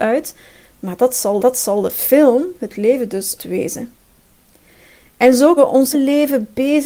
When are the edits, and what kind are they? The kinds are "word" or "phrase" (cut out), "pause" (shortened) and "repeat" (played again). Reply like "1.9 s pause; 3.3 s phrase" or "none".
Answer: 1.4 s repeat; 3.4 s phrase; 5.6 s word; 5.9 s word